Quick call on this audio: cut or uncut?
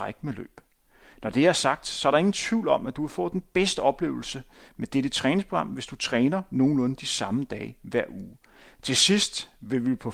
uncut